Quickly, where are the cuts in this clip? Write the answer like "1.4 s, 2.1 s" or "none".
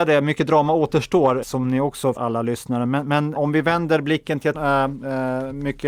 1.4 s, 2.2 s, 3.4 s, 4.5 s